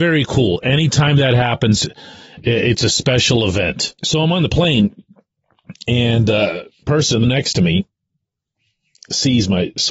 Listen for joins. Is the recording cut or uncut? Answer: cut